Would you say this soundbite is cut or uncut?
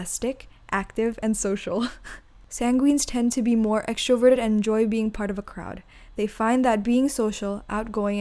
uncut